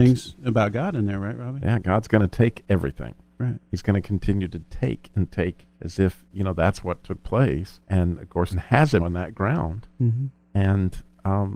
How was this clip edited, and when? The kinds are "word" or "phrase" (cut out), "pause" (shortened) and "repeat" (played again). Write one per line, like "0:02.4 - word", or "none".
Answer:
0:05.7 - pause
0:07.8 - pause
0:08.5 - word
0:09.0 - word